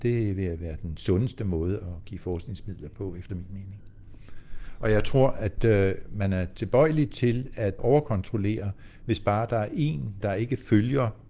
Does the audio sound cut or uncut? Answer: uncut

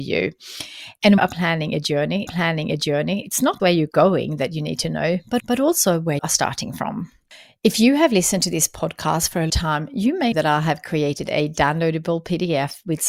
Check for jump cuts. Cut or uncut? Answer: cut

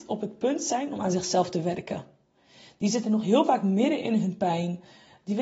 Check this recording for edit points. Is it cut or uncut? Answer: uncut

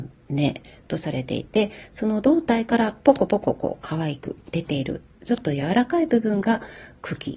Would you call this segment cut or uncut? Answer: uncut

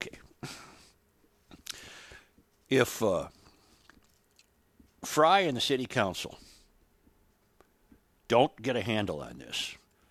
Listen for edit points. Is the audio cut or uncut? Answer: uncut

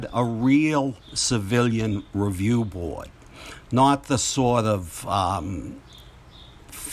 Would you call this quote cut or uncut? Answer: uncut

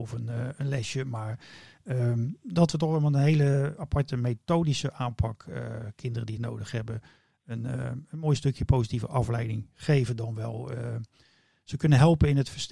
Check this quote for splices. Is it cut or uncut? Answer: cut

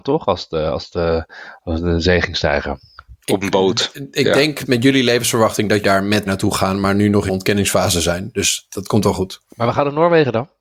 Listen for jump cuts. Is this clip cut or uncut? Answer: cut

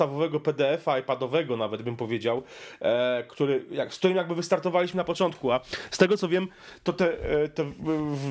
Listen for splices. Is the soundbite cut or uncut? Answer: uncut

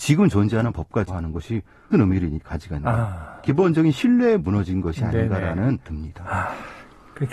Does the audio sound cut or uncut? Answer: cut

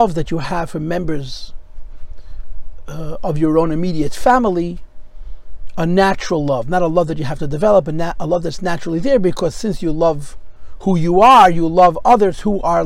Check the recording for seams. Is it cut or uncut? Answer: uncut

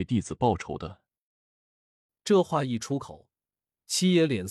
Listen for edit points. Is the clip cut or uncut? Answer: uncut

